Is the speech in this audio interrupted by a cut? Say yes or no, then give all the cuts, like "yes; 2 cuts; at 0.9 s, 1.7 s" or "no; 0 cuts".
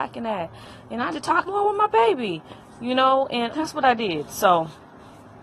yes; 3 cuts; at 1.1 s, 1.5 s, 3.5 s